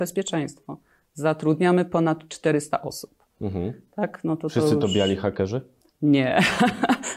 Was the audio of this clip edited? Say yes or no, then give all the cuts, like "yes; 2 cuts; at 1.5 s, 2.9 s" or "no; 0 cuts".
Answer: no; 0 cuts